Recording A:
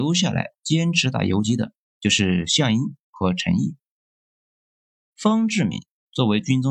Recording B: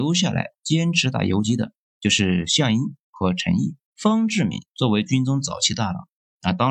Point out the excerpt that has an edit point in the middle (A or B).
B